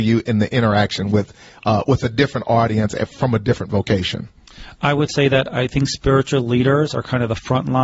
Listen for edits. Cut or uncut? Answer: uncut